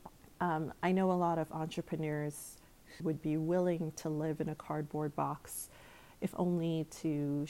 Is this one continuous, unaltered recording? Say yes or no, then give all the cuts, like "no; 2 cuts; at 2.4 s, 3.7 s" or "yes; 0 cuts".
no; 1 cut; at 3.0 s